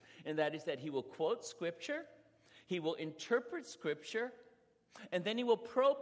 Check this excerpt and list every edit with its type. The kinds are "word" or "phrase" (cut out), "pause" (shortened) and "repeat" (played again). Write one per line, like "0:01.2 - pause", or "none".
none